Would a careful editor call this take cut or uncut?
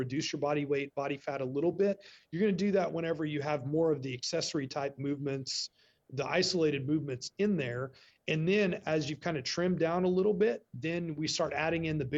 uncut